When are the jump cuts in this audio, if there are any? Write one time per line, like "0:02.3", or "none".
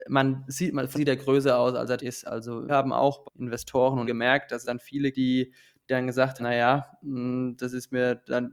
0:00.9
0:02.0
0:02.7
0:03.2
0:04.0
0:04.6
0:05.1
0:06.4